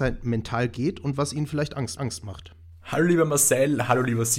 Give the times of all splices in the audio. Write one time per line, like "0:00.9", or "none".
0:02.0